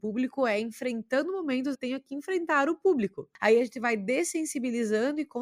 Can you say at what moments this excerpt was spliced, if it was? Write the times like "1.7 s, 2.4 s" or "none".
1.7 s